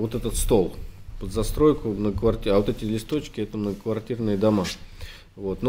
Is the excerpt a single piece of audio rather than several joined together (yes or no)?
yes